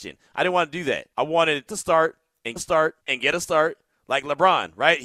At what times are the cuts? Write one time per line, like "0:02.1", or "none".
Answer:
0:01.1
0:01.7
0:02.6
0:03.0
0:03.3